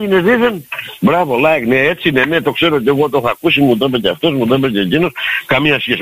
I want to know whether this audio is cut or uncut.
uncut